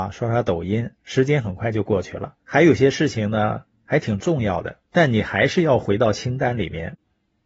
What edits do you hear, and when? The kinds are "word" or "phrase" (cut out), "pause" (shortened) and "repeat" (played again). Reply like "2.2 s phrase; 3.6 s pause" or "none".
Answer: 2.4 s pause; 4.9 s pause